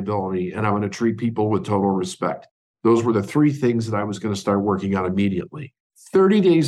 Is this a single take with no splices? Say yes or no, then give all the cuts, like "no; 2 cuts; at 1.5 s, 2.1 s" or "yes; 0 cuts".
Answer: yes; 0 cuts